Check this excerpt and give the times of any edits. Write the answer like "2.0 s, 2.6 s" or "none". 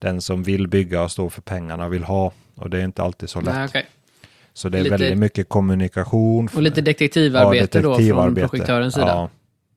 none